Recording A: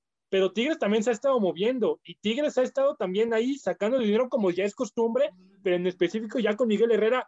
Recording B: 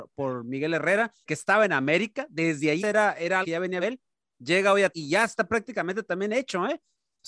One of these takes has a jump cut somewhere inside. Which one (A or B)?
B